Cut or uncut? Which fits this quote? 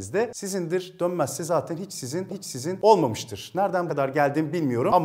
cut